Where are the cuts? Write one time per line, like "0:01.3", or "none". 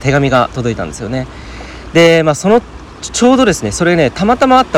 none